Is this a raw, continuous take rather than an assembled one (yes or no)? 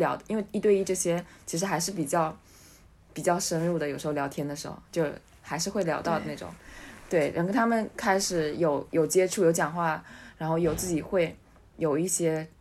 yes